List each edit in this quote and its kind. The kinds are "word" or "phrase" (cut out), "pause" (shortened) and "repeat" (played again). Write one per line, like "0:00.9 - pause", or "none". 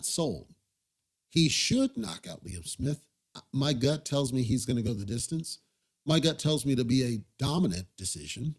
none